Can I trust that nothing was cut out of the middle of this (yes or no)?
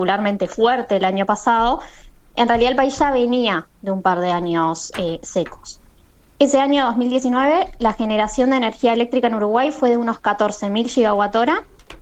yes